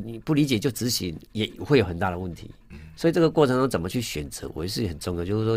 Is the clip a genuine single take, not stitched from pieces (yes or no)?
no